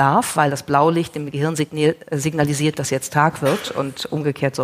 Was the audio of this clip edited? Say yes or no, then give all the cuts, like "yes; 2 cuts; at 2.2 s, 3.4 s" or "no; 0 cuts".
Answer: no; 0 cuts